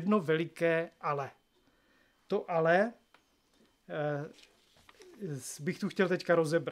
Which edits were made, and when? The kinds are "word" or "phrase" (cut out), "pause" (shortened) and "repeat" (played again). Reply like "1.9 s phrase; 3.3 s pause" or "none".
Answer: none